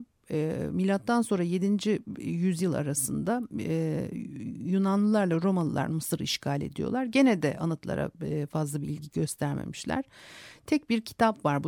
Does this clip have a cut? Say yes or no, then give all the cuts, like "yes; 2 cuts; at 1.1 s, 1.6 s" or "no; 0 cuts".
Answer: no; 0 cuts